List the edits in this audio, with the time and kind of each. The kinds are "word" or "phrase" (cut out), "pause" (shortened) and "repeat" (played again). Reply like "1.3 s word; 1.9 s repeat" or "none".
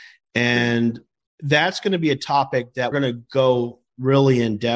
2.9 s word